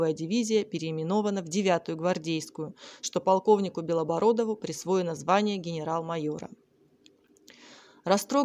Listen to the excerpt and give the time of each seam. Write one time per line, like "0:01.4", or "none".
none